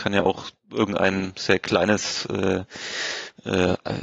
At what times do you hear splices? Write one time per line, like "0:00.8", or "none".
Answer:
none